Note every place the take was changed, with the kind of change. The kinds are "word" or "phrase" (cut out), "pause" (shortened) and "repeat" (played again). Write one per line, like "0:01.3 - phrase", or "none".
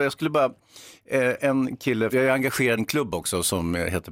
0:02.1 - word
0:02.8 - word